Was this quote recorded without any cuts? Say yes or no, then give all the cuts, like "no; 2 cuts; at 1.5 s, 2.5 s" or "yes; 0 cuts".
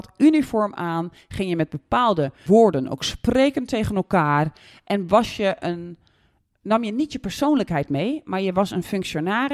no; 1 cut; at 2.5 s